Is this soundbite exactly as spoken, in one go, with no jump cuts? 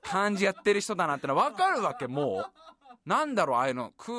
no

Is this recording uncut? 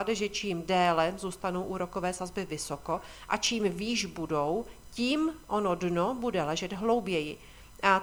yes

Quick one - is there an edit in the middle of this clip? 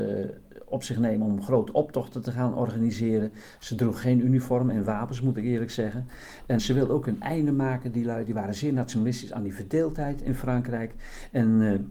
yes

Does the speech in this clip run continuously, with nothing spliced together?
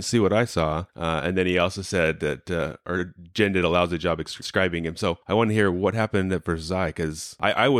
yes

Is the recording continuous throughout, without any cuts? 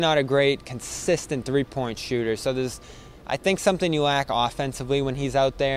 yes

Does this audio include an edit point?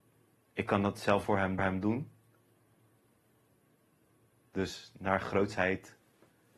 yes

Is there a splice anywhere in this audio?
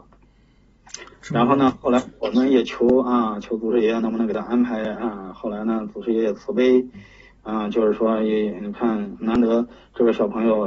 no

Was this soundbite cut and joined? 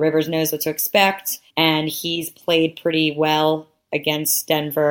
yes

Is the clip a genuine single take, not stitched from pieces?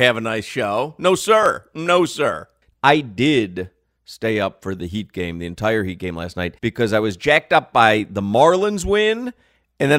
no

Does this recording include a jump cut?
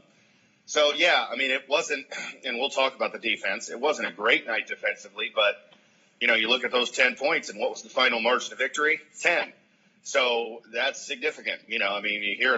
no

